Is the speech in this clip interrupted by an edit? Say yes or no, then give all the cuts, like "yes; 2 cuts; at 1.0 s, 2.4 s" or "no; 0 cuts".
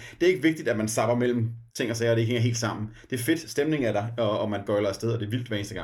yes; 1 cut; at 1.7 s